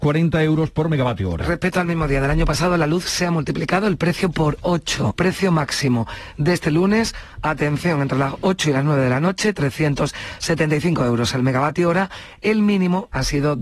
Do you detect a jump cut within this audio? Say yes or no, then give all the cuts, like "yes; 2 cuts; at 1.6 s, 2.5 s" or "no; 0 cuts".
yes; 1 cut; at 5.2 s